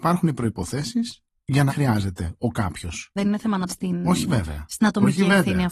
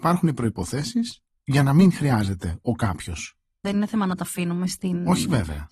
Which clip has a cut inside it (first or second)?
first